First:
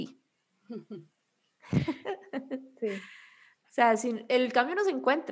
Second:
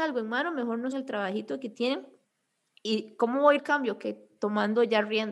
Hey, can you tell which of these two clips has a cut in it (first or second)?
second